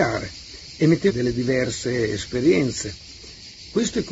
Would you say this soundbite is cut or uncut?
cut